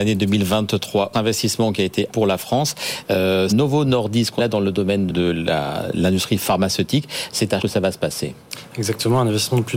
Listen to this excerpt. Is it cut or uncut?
cut